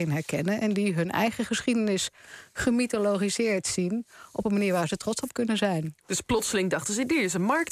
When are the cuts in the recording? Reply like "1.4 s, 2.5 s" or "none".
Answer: none